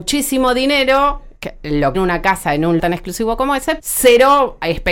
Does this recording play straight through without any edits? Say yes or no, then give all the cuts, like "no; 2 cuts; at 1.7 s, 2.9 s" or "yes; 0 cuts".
no; 4 cuts; at 1.4 s, 1.9 s, 2.8 s, 3.8 s